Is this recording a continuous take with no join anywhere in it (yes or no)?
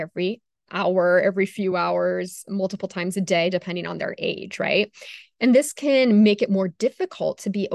yes